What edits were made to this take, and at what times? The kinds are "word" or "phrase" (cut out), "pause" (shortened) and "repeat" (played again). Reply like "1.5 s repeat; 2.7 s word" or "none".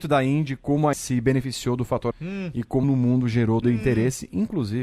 0.9 s word; 2.1 s word; 2.8 s word; 3.6 s word